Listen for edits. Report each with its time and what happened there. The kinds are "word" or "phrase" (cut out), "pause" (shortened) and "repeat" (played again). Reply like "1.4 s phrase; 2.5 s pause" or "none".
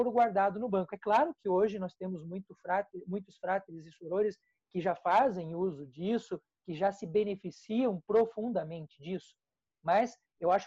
none